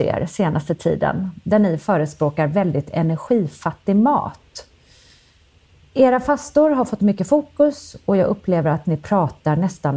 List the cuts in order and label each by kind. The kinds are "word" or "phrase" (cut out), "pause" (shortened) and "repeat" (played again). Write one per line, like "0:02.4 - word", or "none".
none